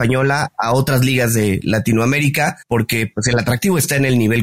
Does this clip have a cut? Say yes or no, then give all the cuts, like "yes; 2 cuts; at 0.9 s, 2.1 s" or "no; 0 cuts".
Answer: yes; 1 cut; at 2.6 s